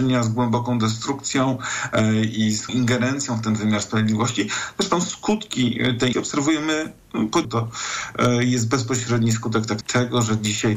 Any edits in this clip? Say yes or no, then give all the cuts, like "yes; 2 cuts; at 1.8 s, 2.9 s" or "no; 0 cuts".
yes; 4 cuts; at 2.7 s, 6.1 s, 7.4 s, 9.8 s